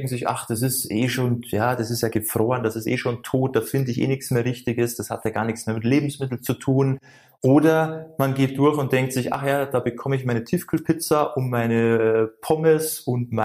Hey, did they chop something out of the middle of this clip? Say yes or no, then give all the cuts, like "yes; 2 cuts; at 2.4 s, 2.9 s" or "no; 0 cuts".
no; 0 cuts